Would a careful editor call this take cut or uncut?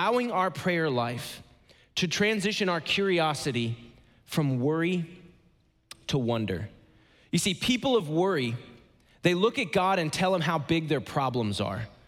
uncut